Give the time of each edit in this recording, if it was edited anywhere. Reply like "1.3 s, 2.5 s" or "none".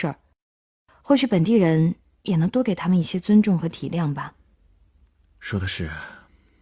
none